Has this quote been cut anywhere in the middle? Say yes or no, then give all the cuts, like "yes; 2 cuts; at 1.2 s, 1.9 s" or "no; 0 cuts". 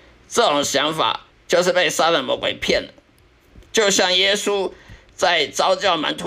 yes; 2 cuts; at 1.3 s, 3.6 s